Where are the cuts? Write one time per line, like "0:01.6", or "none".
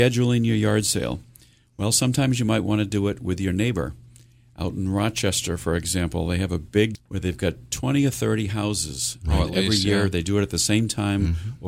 0:06.9